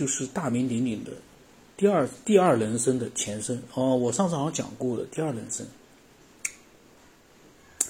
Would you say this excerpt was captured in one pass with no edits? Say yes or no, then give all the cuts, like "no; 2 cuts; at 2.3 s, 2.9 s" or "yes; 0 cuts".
no; 1 cut; at 1.4 s